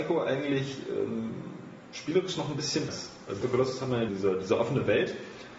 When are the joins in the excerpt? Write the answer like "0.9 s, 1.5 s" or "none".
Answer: 2.9 s, 3.4 s, 4.1 s